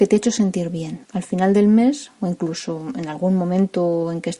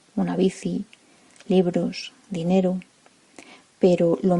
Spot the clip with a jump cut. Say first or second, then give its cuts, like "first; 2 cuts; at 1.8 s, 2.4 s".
first; 1 cut; at 1.0 s